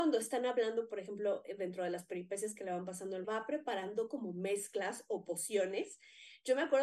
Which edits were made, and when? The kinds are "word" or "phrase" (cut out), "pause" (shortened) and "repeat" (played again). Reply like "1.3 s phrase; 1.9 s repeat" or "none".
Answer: 3.2 s phrase